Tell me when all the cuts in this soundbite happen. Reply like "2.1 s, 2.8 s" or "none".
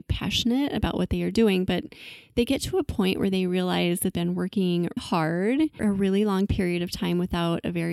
4.1 s, 5.0 s, 5.8 s